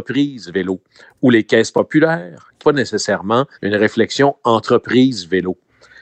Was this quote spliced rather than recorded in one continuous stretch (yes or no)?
yes